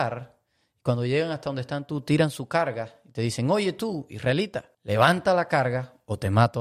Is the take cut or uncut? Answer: cut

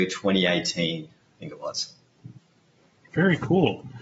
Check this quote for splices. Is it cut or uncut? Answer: uncut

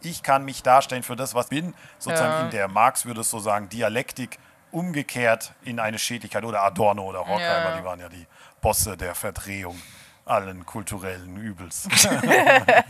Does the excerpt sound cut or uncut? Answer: cut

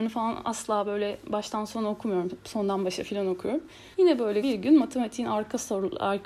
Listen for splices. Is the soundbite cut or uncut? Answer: cut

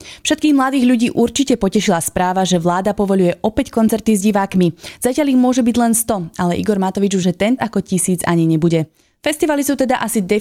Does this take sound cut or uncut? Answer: cut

